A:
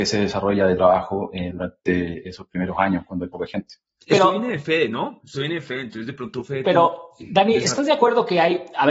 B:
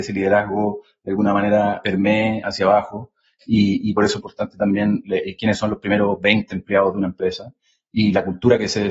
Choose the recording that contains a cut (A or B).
B